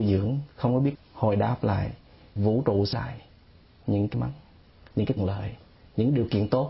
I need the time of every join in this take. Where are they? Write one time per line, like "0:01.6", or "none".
0:00.9
0:02.4
0:02.9
0:04.1
0:05.2

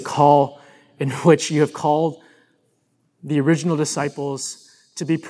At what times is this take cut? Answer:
none

